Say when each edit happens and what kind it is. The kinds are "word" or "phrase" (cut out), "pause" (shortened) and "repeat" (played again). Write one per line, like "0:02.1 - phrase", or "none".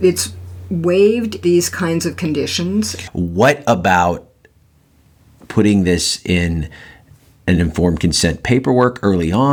0:01.4 - word